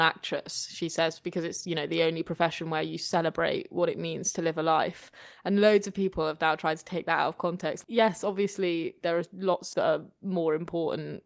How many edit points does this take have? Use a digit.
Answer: 1